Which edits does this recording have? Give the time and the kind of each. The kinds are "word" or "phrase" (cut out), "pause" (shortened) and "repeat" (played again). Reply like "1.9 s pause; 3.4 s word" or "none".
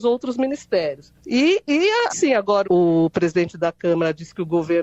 1.2 s pause; 2.1 s phrase; 2.6 s word